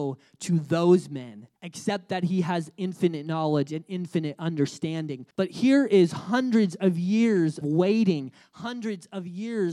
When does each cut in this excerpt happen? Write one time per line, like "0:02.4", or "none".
0:01.6
0:05.3
0:07.6